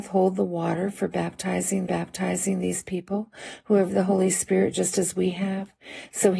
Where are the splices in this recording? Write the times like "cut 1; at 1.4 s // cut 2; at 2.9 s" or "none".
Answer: cut 1; at 1.9 s // cut 2; at 3.9 s